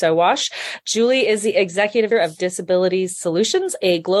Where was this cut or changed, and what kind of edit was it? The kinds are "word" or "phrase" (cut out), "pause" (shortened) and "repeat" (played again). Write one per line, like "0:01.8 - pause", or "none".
0:02.1 - word